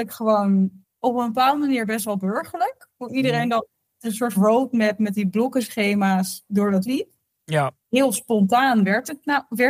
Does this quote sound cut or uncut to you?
cut